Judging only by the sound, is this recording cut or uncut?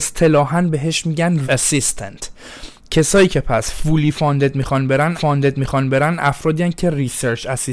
cut